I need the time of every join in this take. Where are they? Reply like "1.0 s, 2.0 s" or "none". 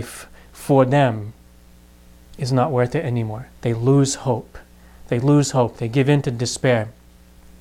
3.5 s